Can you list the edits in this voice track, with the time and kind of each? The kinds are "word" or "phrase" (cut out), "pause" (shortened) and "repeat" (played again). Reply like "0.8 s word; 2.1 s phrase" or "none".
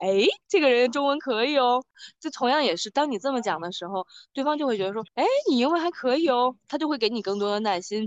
5.1 s pause

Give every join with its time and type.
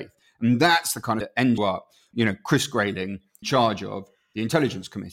1.2 s word; 1.6 s word; 2.1 s word; 3.4 s word

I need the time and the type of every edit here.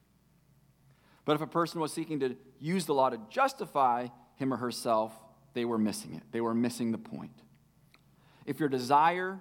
none

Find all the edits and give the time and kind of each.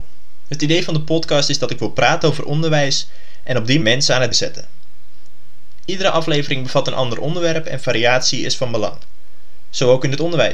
3.8 s word; 4.3 s word

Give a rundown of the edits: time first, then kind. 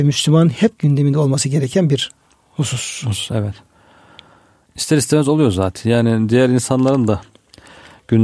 none

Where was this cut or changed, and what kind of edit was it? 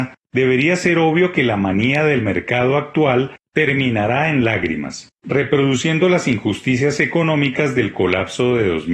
none

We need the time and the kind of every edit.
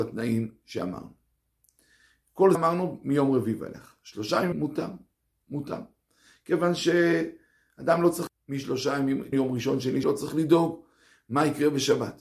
2.5 s word; 4.5 s word; 8.3 s word; 9.3 s word; 10.0 s word

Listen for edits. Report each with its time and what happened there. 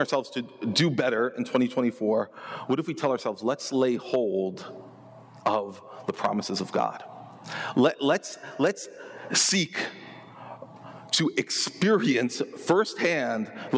none

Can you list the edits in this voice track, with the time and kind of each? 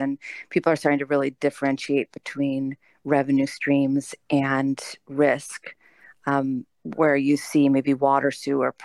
none

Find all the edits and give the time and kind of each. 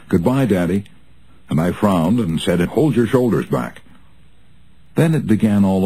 2.6 s word

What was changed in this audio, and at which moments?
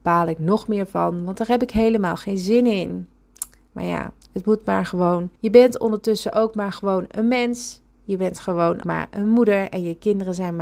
5.3 s pause; 8.8 s word

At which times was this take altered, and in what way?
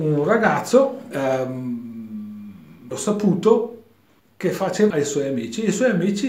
1.1 s word; 2.9 s word; 4.2 s pause; 4.9 s phrase

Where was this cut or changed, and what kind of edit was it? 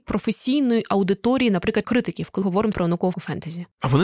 1.8 s word; 2.4 s word; 2.7 s word; 3.1 s word

